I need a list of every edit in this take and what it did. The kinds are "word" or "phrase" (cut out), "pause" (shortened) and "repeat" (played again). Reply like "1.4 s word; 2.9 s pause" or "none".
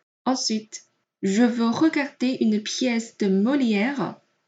none